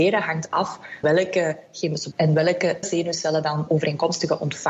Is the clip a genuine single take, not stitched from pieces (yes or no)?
no